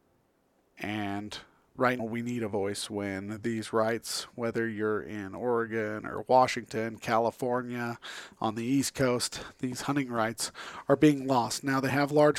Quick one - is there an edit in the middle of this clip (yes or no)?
yes